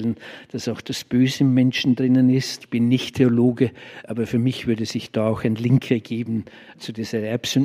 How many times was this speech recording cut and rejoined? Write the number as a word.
zero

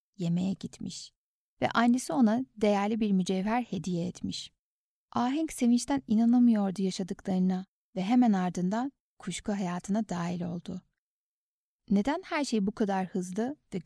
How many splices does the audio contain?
zero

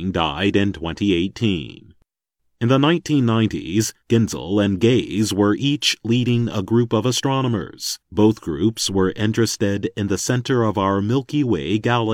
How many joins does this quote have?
three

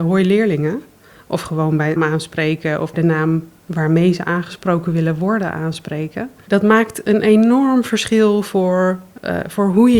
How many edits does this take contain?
two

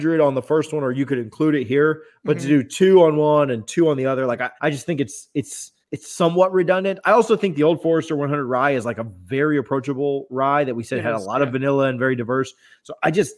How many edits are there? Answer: two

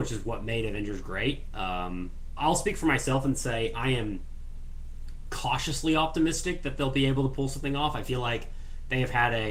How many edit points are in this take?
one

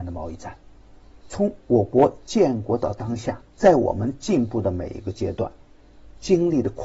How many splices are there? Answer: two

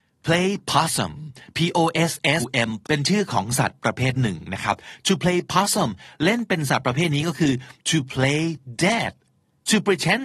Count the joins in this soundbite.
two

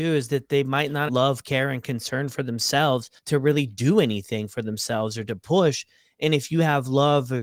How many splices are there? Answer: two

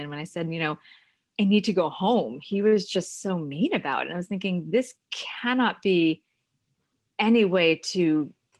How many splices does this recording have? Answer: zero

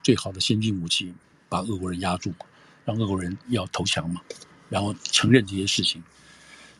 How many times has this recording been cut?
zero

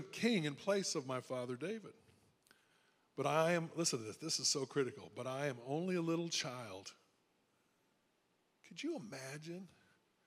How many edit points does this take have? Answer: zero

